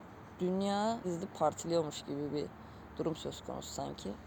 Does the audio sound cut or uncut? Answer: cut